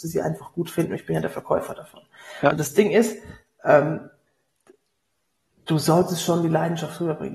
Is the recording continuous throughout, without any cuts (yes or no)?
yes